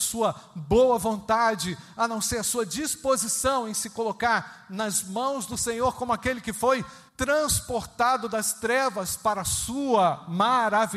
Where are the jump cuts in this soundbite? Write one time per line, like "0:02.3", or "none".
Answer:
0:07.1